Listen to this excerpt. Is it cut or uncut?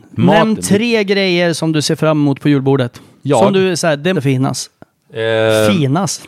cut